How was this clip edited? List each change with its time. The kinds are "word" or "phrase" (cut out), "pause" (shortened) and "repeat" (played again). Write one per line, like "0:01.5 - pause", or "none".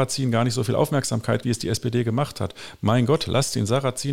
0:01.4 - word